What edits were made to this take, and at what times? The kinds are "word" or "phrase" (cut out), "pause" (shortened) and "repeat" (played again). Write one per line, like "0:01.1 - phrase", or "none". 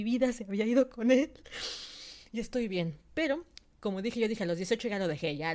none